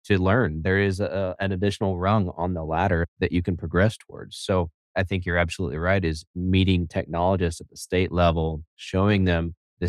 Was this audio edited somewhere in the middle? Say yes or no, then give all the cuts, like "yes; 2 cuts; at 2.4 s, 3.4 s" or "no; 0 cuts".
yes; 1 cut; at 1.4 s